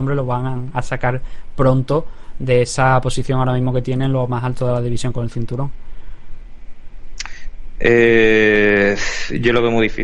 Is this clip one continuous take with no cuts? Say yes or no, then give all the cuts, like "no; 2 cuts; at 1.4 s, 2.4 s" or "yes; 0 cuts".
yes; 0 cuts